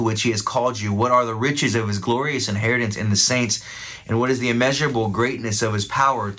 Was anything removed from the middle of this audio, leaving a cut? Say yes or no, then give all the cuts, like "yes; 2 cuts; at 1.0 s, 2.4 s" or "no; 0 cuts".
no; 0 cuts